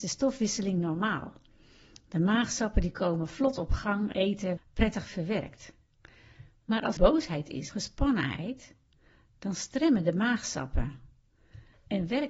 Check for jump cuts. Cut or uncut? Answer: cut